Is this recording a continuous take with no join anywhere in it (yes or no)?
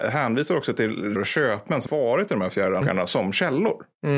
no